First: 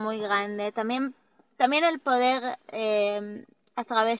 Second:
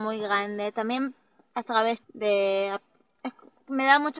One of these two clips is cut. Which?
second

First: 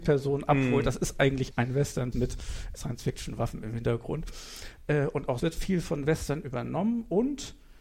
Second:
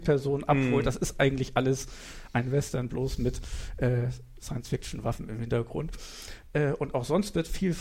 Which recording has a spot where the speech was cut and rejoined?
first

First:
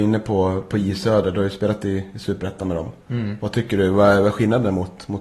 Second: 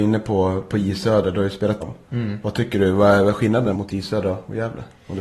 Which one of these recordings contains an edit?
second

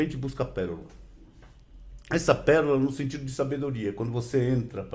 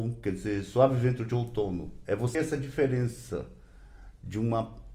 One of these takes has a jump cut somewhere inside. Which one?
second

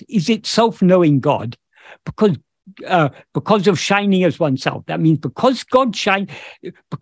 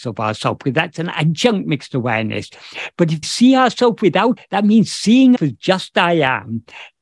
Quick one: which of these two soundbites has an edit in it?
second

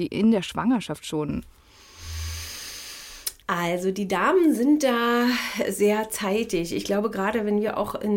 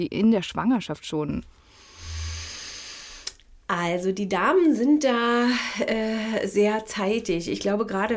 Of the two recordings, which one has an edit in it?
first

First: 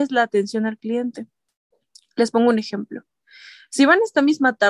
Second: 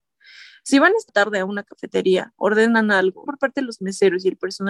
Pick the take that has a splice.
second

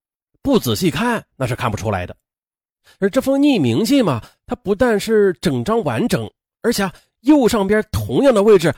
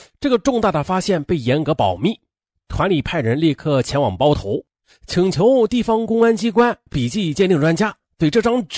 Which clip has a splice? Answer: second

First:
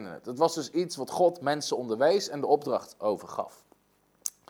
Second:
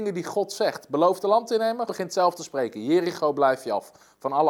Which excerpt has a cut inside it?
second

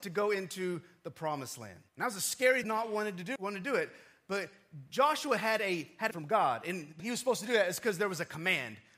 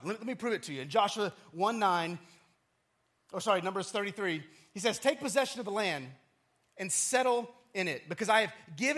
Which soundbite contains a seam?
first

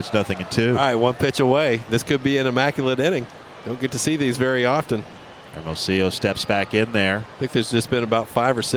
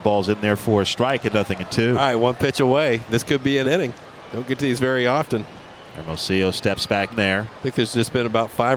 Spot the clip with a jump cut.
second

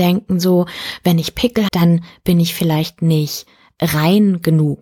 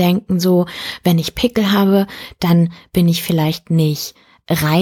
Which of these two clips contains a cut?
first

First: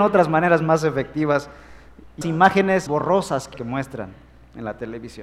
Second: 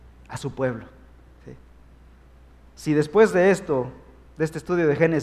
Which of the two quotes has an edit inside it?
first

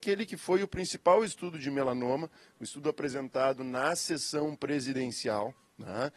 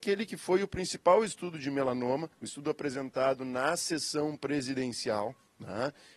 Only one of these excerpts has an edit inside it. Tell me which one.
second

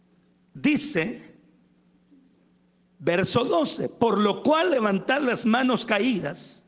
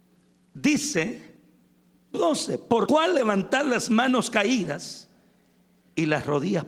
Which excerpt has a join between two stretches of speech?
second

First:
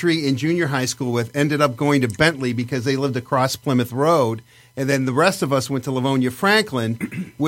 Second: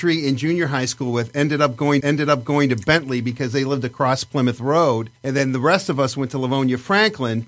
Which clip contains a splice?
second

